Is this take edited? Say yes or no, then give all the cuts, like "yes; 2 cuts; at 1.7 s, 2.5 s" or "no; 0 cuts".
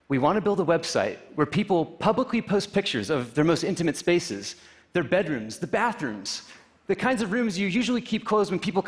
no; 0 cuts